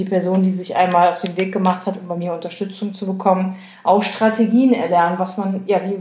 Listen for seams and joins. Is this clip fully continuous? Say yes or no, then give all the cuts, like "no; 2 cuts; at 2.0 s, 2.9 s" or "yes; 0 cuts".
yes; 0 cuts